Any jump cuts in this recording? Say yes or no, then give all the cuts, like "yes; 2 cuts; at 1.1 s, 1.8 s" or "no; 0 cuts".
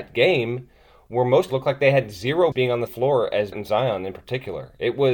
yes; 4 cuts; at 1.5 s, 2.5 s, 2.9 s, 3.5 s